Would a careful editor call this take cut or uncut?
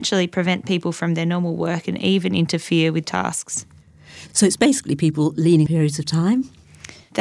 cut